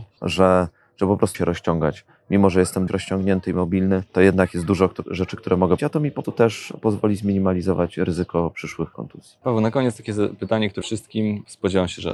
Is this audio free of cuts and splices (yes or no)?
no